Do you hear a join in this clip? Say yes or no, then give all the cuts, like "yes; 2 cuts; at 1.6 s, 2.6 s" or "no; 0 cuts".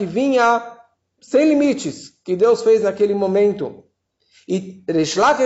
yes; 1 cut; at 1.2 s